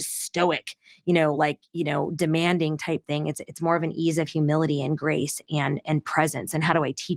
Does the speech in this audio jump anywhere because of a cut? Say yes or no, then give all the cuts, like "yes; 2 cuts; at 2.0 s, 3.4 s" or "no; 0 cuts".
no; 0 cuts